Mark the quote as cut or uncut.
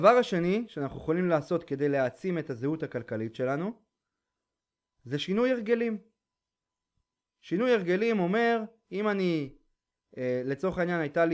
uncut